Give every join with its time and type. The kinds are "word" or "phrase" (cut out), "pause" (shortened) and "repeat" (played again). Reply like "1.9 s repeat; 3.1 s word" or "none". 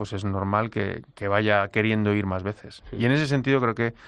none